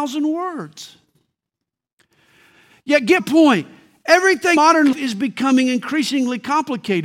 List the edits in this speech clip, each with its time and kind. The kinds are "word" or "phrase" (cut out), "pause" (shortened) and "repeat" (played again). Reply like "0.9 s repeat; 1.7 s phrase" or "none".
3.2 s word; 4.6 s word; 4.9 s word